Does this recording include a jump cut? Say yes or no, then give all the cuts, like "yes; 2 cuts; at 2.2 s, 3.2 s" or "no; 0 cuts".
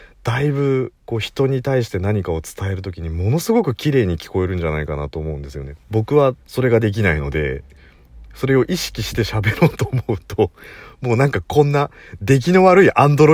yes; 3 cuts; at 1.0 s, 5.8 s, 6.4 s